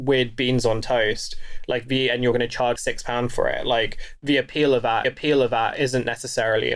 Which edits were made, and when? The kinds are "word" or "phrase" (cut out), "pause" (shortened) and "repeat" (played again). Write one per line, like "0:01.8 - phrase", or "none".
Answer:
0:02.8 - word
0:05.0 - repeat